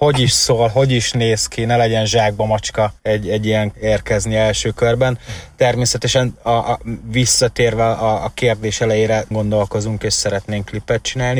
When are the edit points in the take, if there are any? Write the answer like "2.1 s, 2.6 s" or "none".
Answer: 3.0 s, 3.7 s, 9.3 s